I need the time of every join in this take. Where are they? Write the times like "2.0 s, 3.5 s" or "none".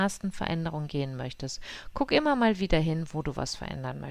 none